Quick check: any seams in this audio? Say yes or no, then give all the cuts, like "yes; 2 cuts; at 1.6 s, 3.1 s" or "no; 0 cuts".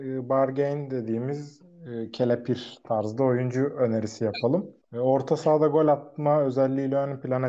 yes; 1 cut; at 4.8 s